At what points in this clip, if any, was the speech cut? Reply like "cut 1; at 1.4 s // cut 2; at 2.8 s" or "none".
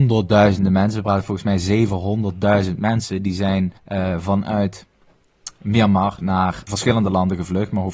cut 1; at 3.8 s